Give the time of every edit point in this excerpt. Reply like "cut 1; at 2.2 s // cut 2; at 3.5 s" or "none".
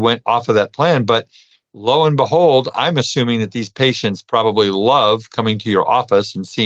none